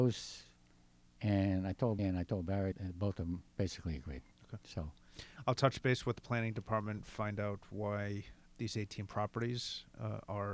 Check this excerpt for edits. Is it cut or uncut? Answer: cut